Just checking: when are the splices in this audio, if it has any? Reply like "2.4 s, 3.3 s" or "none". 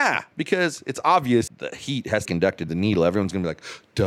1.5 s, 2.2 s, 2.7 s